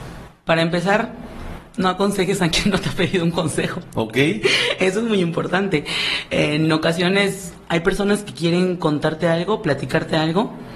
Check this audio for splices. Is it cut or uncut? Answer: uncut